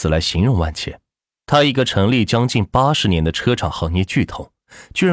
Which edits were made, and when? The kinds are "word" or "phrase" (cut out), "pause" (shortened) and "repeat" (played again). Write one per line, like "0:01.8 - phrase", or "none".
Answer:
0:01.2 - pause